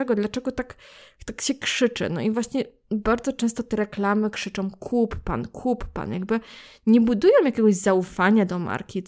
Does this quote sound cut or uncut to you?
uncut